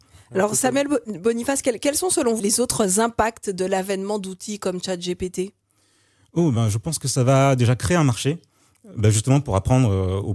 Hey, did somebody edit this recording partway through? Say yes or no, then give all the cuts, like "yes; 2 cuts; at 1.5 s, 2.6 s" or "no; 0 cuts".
yes; 1 cut; at 2.4 s